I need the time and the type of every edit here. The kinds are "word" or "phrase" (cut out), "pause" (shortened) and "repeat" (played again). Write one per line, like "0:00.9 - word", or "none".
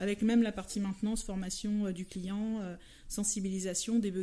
none